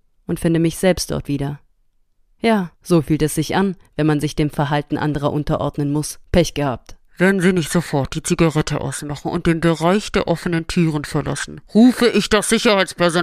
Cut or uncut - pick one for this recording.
cut